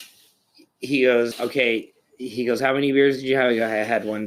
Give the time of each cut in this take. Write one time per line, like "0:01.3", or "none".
0:01.3